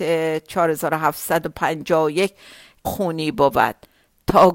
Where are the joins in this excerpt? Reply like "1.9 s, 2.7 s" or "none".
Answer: 2.8 s

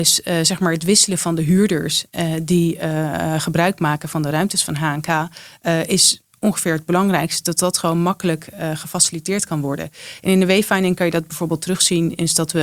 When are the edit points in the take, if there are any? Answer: none

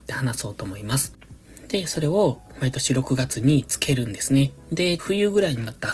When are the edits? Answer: 5.0 s

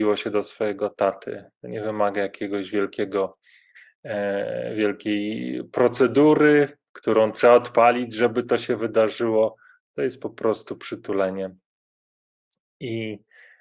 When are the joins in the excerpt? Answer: none

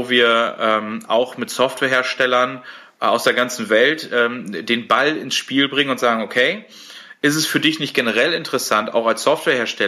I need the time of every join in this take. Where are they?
none

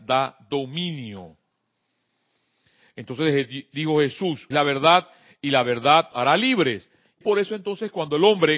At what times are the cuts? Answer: 4.5 s, 6.1 s, 7.2 s

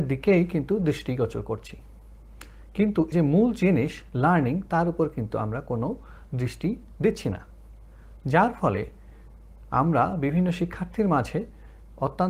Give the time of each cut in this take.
3.1 s

